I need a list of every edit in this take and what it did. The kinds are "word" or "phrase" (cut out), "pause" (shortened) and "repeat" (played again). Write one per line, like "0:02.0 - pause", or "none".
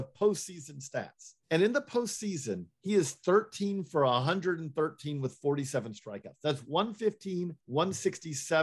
0:01.4 - pause
0:02.7 - pause
0:07.6 - pause